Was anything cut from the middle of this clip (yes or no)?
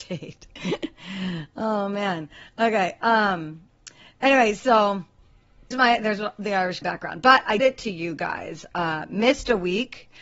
yes